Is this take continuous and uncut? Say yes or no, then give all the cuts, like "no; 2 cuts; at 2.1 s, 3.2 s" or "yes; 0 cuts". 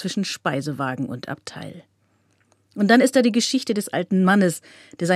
yes; 0 cuts